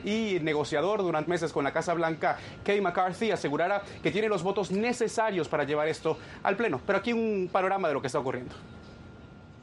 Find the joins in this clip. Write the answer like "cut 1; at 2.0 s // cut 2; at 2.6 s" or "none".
cut 1; at 1.3 s